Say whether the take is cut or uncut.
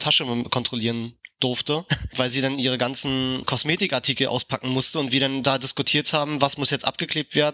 uncut